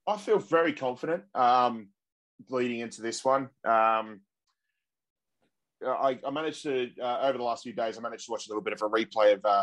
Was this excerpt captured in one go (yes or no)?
yes